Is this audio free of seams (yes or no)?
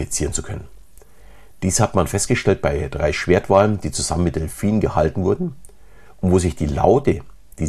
yes